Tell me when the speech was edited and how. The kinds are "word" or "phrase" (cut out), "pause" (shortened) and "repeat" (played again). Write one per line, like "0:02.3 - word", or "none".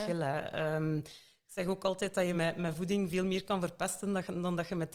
none